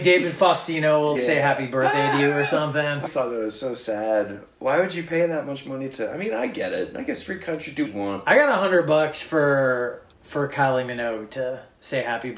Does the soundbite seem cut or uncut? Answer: cut